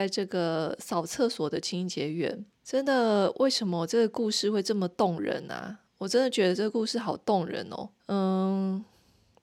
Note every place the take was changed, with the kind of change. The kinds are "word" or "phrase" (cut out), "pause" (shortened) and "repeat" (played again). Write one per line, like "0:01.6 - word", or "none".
0:02.5 - pause
0:05.9 - pause
0:08.0 - pause